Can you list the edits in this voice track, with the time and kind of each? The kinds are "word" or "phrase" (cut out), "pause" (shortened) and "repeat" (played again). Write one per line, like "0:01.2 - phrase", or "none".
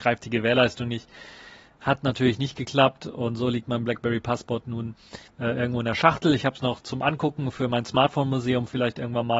0:05.3 - pause